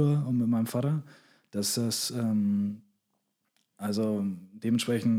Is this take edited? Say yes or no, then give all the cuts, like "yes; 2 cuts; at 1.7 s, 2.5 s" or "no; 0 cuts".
no; 0 cuts